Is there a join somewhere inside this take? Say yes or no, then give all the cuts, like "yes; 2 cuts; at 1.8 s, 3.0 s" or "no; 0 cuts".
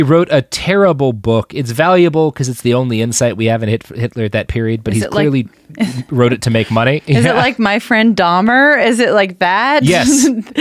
no; 0 cuts